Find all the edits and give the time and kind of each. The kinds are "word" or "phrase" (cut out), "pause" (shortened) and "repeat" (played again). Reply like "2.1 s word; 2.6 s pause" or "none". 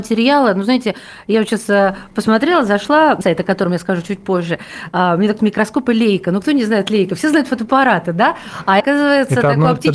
3.2 s word; 5.4 s word; 8.8 s word